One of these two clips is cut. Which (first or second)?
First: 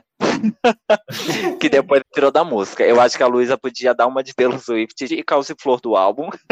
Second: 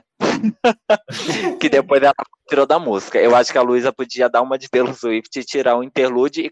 first